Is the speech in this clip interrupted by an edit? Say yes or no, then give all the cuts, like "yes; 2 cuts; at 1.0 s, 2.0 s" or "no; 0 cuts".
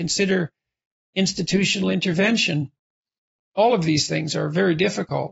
no; 0 cuts